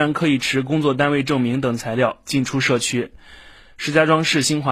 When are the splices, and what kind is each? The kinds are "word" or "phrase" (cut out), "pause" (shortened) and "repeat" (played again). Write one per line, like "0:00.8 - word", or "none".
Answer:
none